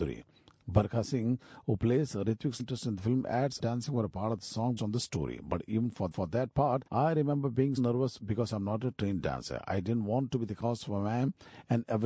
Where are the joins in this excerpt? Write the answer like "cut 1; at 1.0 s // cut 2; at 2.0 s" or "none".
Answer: cut 1; at 2.6 s // cut 2; at 3.6 s // cut 3; at 4.8 s // cut 4; at 6.1 s // cut 5; at 6.9 s // cut 6; at 7.8 s